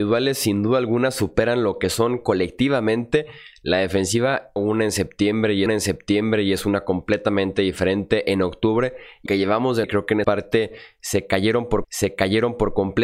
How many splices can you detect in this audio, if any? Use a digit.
6